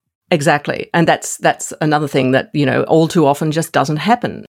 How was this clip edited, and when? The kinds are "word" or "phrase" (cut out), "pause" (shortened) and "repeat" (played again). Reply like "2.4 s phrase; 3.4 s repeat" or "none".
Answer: none